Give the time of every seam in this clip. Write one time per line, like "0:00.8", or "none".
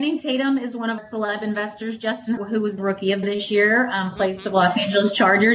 0:01.0
0:02.4
0:02.8
0:03.2